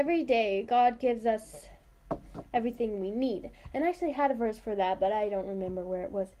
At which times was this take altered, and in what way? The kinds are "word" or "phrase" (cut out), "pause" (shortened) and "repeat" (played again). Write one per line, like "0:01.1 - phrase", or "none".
none

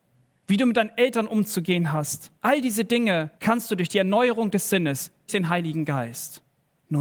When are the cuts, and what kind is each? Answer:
0:02.4 - pause
0:03.4 - pause
0:05.3 - word

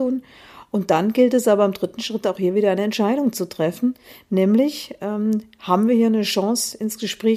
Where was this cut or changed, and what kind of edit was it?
none

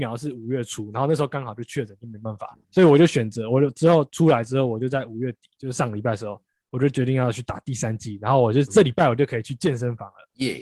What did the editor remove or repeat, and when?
0:02.6 - pause

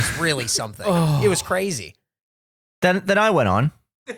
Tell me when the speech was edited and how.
none

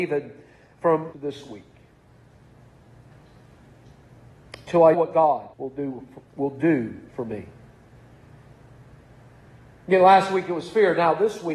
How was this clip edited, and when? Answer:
0:01.1 - phrase
0:04.9 - word
0:05.5 - pause
0:06.3 - pause
0:07.1 - pause

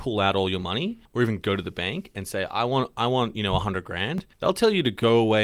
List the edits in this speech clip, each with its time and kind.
0:01.1 - pause
0:04.3 - pause

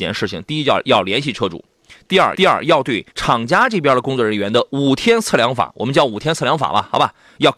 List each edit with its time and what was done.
0:02.3 - repeat
0:03.1 - pause

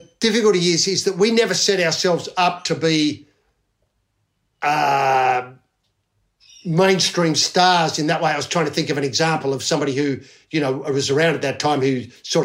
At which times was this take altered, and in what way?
none

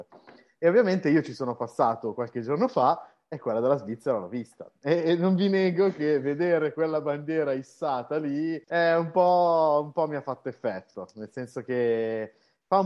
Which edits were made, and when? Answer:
0:08.6 - pause

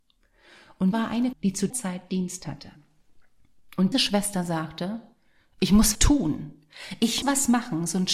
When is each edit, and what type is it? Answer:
0:00.9 - word
0:01.3 - word
0:01.7 - word
0:03.9 - word
0:05.9 - word
0:07.2 - word

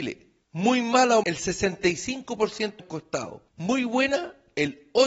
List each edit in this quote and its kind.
0:01.2 - word
0:02.8 - word
0:03.5 - pause

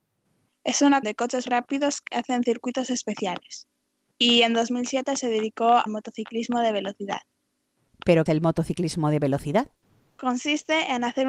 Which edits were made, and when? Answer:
0:01.0 - word
0:01.5 - word
0:02.1 - word
0:05.9 - word
0:08.3 - word

